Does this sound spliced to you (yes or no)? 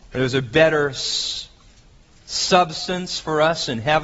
no